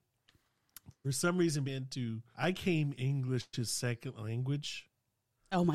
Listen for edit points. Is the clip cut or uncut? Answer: cut